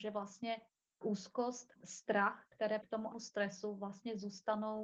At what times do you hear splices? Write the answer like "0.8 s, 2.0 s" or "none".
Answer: 1.0 s, 1.8 s, 2.8 s, 3.1 s

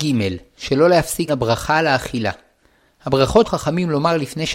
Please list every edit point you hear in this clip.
1.3 s, 3.4 s

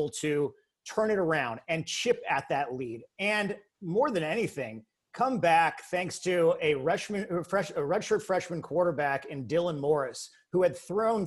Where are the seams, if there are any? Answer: none

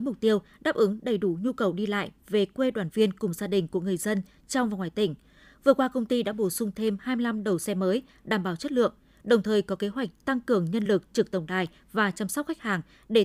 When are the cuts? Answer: none

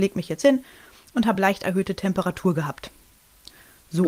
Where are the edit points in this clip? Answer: none

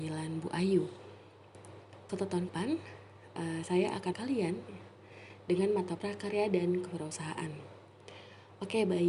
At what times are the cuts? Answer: 2.1 s, 2.5 s, 4.1 s, 6.0 s

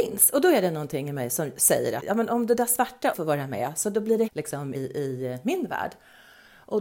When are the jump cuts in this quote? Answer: 2.0 s, 3.1 s, 4.3 s, 4.7 s

